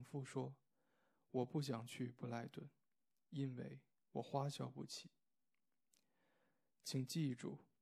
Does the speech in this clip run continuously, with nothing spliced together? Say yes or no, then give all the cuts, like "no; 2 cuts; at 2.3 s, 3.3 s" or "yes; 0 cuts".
yes; 0 cuts